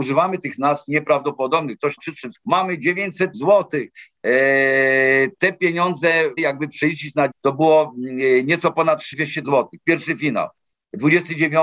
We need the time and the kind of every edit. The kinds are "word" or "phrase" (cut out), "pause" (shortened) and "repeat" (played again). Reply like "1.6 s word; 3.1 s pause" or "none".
2.0 s word; 2.3 s word; 3.3 s word; 6.4 s word; 7.3 s word; 9.1 s word; 9.4 s word